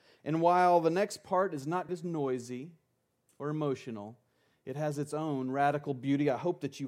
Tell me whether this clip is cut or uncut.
cut